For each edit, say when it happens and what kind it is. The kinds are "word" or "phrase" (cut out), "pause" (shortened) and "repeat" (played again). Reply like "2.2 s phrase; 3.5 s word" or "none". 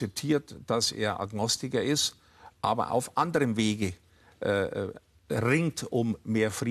none